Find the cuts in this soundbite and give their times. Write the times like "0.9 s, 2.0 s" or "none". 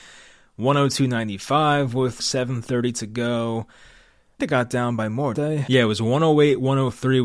2.2 s, 4.4 s, 5.3 s